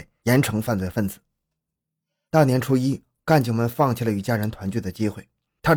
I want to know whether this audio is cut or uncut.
uncut